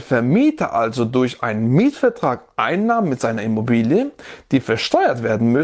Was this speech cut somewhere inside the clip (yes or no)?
no